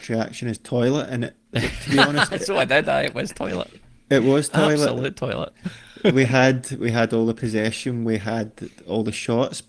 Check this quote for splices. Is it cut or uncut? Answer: uncut